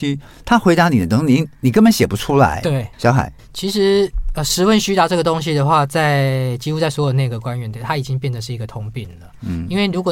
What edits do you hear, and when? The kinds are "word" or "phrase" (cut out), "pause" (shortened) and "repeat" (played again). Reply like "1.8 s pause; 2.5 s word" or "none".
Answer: 2.9 s pause; 3.4 s pause